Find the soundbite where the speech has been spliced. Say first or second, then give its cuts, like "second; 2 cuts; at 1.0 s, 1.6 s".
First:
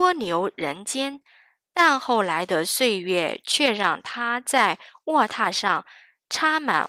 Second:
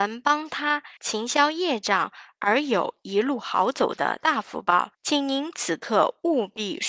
second; 2 cuts; at 1.0 s, 4.9 s